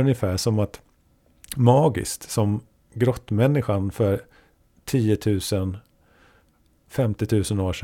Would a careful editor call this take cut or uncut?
uncut